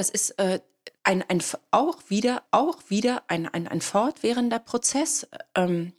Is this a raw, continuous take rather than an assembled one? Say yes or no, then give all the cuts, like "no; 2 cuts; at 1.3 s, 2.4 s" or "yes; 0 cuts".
no; 2 cuts; at 1.0 s, 2.5 s